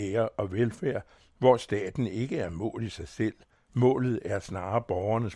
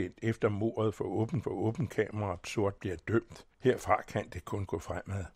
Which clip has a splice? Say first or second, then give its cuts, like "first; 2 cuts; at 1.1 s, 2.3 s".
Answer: second; 4 cuts; at 1.4 s, 2.4 s, 2.8 s, 3.5 s